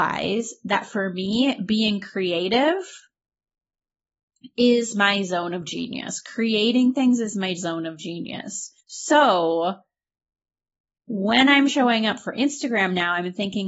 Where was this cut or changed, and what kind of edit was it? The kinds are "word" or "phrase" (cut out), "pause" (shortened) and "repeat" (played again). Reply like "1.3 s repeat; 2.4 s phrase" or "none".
8.8 s pause